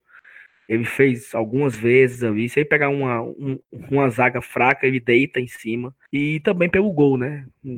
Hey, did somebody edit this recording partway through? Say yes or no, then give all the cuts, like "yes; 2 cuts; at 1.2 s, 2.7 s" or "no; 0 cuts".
yes; 1 cut; at 6.1 s